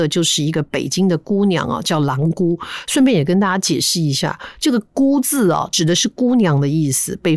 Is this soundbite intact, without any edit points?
yes; 0 cuts

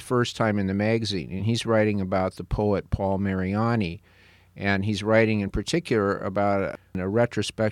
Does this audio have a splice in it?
no; 0 cuts

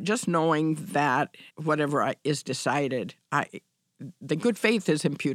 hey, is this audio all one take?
no; 1 cut; at 1.5 s

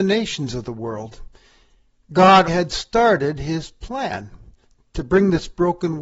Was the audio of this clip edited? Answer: yes; 1 cut; at 2.5 s

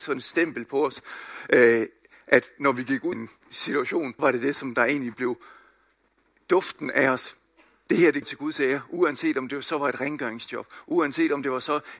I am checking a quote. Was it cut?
yes; 3 cuts; at 3.1 s, 4.2 s, 8.2 s

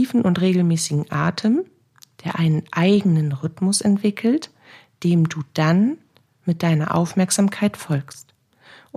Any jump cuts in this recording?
no; 0 cuts

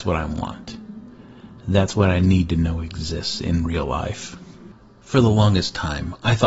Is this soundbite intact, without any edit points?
yes; 0 cuts

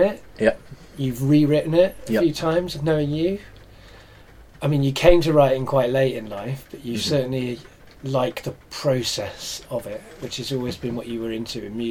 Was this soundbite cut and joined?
yes; 1 cut; at 0.9 s

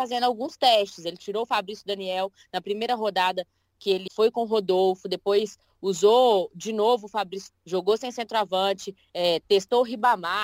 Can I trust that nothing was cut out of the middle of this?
no; 2 cuts; at 4.1 s, 7.5 s

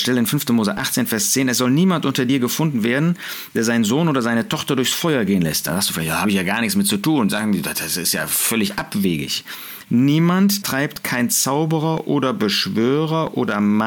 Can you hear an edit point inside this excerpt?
yes; 1 cut; at 10.6 s

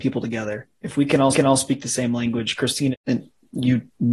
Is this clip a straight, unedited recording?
no; 2 cuts; at 1.3 s, 2.9 s

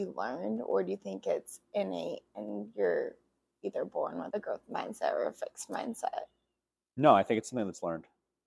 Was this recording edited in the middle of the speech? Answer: no; 0 cuts

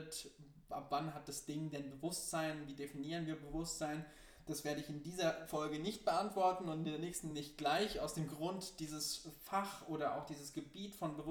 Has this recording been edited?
no; 0 cuts

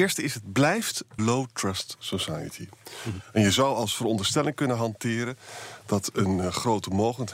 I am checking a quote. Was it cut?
yes; 1 cut; at 1.2 s

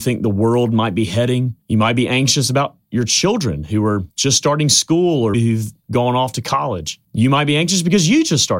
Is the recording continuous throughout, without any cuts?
no; 4 cuts; at 1.6 s, 4.1 s, 5.3 s, 7.0 s

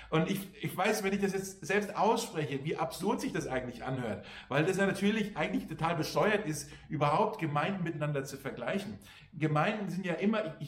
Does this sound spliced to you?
no; 0 cuts

